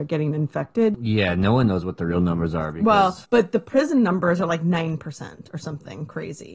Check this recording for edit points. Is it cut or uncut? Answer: cut